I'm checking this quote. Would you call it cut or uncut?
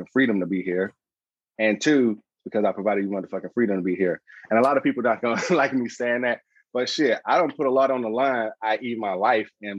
uncut